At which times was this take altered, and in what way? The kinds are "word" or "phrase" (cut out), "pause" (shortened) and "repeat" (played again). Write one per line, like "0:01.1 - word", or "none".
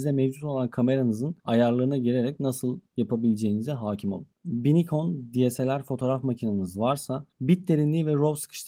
0:01.4 - pause
0:02.9 - pause
0:07.3 - pause